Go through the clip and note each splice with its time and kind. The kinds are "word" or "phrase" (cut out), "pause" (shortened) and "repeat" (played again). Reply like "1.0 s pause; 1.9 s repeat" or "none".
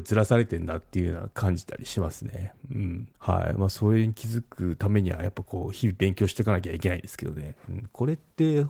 3.1 s pause